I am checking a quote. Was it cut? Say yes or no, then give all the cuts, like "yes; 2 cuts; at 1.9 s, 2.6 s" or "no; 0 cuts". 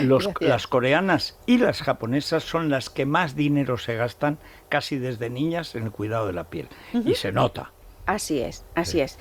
no; 0 cuts